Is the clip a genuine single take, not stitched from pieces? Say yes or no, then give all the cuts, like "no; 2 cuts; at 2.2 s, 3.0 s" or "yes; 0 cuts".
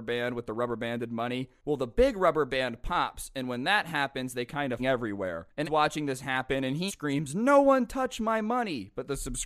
no; 3 cuts; at 4.8 s, 5.6 s, 6.9 s